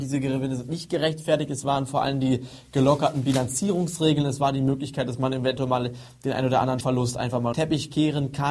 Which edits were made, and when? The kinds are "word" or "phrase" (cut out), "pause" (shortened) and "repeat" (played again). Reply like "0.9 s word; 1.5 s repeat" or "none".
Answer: 6.8 s word; 7.5 s word